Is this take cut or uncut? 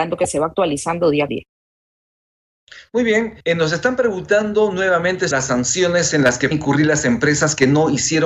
cut